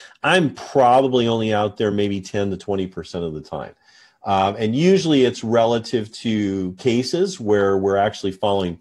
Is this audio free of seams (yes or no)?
yes